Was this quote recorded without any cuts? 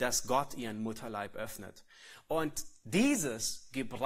yes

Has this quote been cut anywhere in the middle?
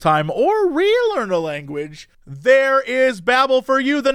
yes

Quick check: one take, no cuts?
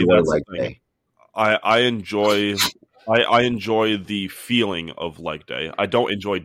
yes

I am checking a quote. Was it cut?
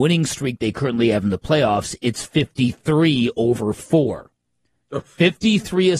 no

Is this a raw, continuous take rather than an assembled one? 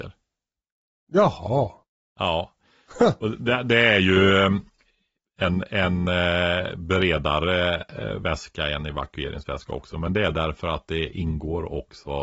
yes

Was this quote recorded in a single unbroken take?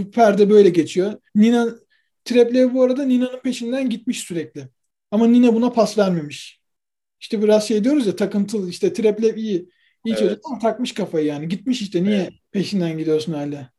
no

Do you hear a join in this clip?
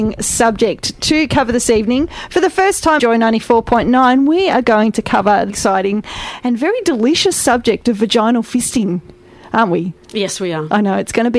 yes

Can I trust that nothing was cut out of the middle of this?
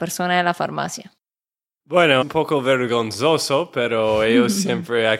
no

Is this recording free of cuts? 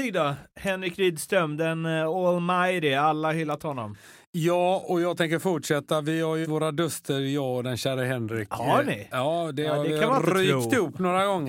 no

